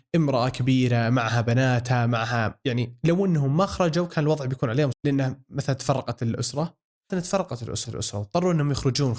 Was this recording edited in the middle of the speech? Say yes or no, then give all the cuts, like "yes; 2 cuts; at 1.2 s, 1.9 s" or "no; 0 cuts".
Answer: yes; 3 cuts; at 4.9 s, 7.1 s, 7.8 s